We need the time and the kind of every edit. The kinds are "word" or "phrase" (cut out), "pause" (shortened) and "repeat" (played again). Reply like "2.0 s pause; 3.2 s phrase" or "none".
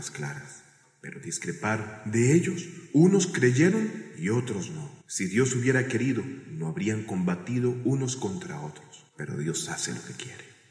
5.0 s pause; 9.1 s pause

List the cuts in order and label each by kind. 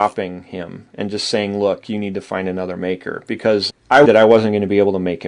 3.7 s word; 4.0 s phrase

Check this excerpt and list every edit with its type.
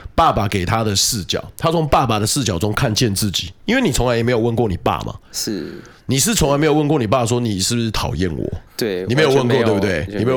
8.7 s pause

